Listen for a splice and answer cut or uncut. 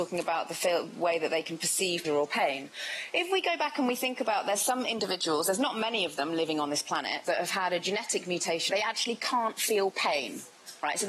cut